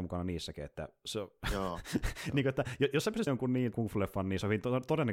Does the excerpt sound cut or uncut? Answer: cut